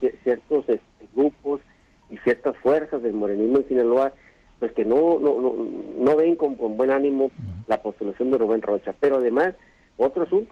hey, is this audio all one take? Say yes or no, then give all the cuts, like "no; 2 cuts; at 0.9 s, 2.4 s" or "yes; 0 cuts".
yes; 0 cuts